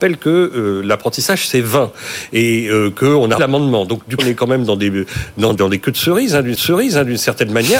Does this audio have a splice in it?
yes; 4 cuts; at 3.4 s, 4.2 s, 5.6 s, 6.6 s

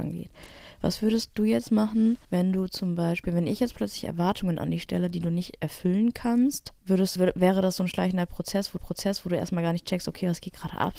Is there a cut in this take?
yes; 4 cuts; at 2.2 s, 6.8 s, 7.2 s, 8.8 s

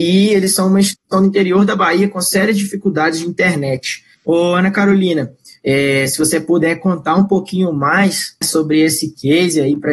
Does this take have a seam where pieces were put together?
yes; 2 cuts; at 4.1 s, 8.4 s

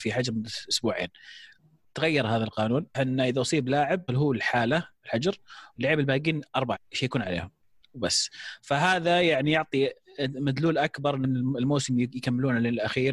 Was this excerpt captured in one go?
no; 4 cuts; at 2.9 s, 4.1 s, 6.7 s, 11.2 s

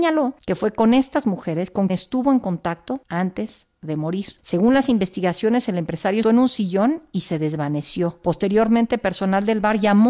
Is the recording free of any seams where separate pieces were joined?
no; 2 cuts; at 1.9 s, 6.2 s

